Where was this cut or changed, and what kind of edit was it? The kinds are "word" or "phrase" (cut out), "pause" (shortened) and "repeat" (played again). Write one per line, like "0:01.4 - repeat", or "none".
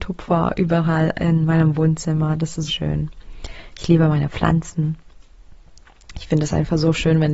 0:02.7 - word